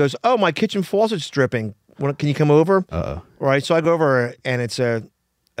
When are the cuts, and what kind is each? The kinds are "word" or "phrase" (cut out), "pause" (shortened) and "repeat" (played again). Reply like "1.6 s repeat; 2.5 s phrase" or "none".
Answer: none